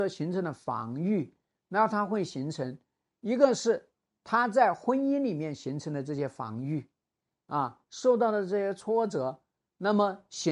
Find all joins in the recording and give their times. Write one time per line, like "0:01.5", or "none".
none